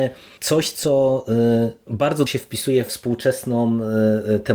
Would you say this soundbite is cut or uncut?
cut